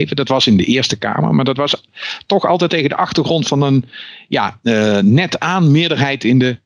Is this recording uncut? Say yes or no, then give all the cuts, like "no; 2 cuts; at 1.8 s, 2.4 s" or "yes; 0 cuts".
no; 1 cut; at 2.7 s